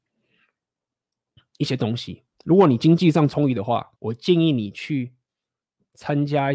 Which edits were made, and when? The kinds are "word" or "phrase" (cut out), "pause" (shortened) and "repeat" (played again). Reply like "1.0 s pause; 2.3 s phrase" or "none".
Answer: 2.3 s pause; 4.0 s pause